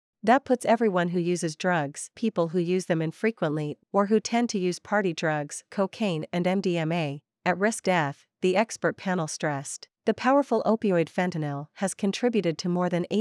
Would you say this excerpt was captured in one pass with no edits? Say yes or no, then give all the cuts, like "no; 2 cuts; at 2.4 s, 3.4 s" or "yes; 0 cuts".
no; 5 cuts; at 2.1 s, 3.8 s, 5.7 s, 7.8 s, 10.0 s